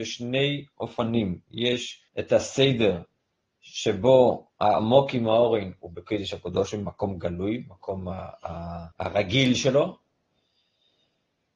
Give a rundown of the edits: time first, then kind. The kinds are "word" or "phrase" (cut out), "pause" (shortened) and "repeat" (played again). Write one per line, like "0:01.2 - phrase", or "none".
0:02.1 - pause
0:03.2 - pause
0:08.9 - pause